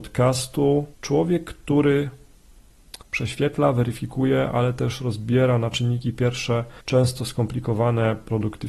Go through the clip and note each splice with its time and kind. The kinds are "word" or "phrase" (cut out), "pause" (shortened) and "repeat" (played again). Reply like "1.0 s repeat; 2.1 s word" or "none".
0.9 s pause; 3.0 s pause; 6.8 s pause

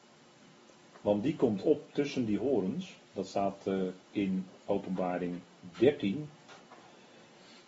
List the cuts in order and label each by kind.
3.1 s pause; 4.0 s pause

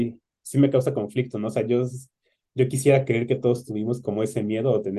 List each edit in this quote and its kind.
none

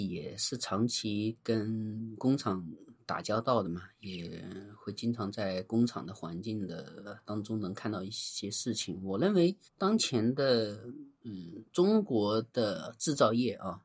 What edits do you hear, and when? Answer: 9.7 s pause

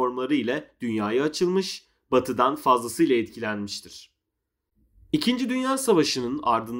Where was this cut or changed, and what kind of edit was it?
none

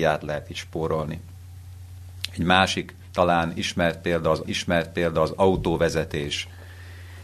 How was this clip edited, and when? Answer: 4.4 s repeat

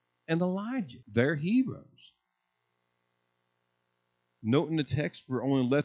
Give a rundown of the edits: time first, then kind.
1.0 s pause

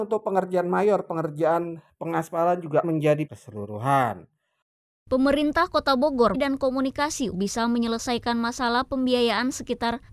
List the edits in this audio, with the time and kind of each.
2.8 s word; 3.3 s phrase; 6.3 s phrase; 7.3 s word

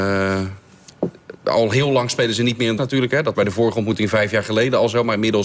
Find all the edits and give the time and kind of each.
2.8 s word; 3.3 s word

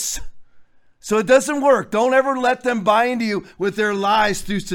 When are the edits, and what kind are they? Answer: none

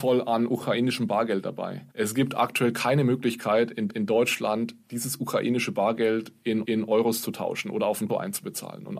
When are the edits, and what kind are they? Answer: 1.9 s pause; 3.9 s repeat; 6.6 s repeat; 8.1 s word

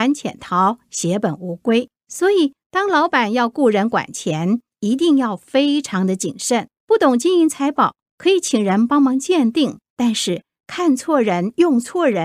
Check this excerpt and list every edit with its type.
2.0 s pause; 6.8 s pause; 9.9 s pause

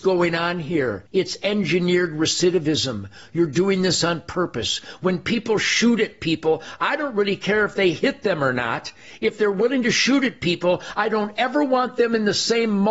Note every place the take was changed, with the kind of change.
1.1 s pause

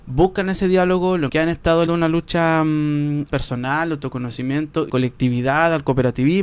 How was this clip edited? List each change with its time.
1.3 s word; 1.9 s word; 3.3 s word; 4.9 s phrase

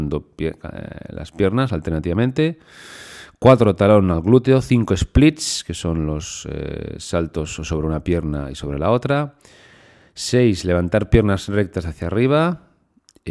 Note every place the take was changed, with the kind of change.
none

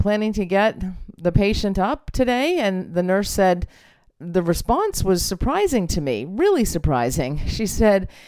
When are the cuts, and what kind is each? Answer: none

